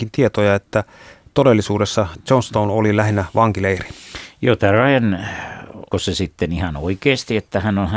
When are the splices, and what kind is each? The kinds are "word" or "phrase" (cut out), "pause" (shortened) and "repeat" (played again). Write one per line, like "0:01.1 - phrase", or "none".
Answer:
0:05.9 - word